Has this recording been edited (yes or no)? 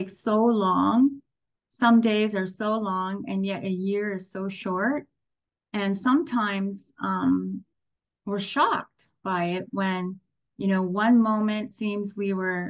yes